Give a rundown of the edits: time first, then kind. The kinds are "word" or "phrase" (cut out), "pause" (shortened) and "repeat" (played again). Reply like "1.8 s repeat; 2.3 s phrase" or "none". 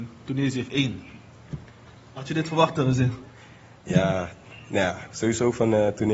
none